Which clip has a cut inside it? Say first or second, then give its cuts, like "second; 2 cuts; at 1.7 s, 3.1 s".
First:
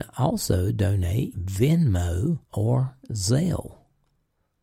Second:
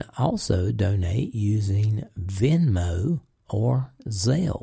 first; 2 cuts; at 1.3 s, 2.4 s